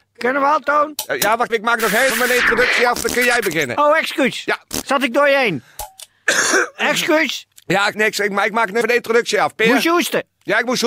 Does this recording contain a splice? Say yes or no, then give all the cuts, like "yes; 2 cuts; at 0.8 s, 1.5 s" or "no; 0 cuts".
yes; 4 cuts; at 1.5 s, 2.1 s, 7.9 s, 8.8 s